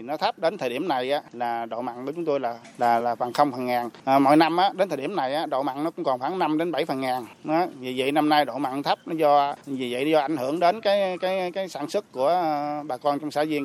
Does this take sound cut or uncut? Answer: cut